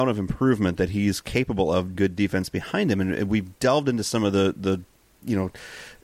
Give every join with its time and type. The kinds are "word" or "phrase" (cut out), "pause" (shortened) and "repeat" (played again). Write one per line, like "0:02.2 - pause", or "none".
0:01.9 - phrase
0:03.6 - pause